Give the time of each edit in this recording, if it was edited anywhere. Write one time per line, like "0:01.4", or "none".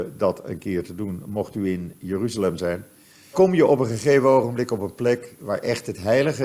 0:03.3

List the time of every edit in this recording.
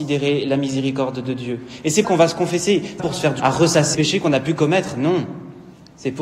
0:02.0
0:03.0
0:03.4
0:03.9

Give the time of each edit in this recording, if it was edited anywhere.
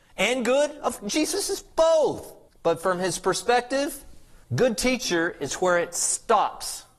0:02.5
0:04.4

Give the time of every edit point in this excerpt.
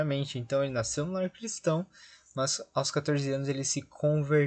none

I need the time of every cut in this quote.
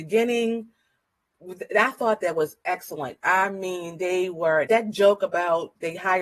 0:04.7

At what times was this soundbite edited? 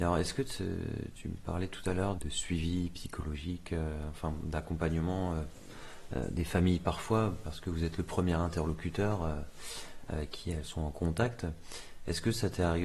0:02.2

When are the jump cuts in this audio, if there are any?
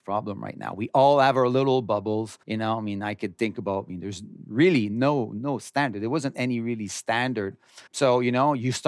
0:02.4
0:07.9

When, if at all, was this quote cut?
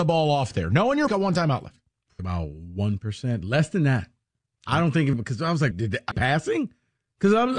0:01.1
0:02.2
0:05.1
0:05.7
0:06.1

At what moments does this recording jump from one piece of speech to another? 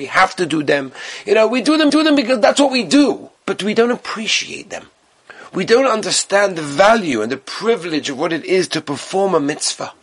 0:01.9
0:03.4

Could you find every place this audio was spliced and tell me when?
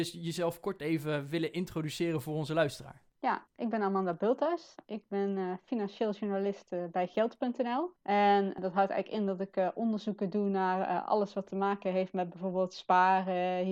0:03.1
0:08.0

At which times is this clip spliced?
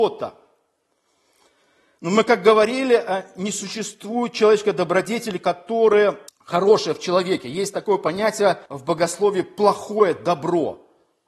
0:06.3
0:08.7

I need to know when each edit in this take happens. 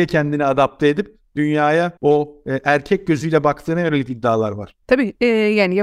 0:02.0
0:04.8

